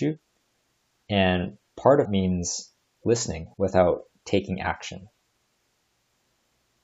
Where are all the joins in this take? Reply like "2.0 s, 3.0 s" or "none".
2.0 s, 3.5 s